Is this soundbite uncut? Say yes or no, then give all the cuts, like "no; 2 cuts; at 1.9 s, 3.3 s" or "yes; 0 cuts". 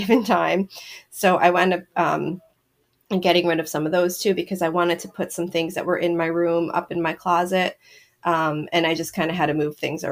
yes; 0 cuts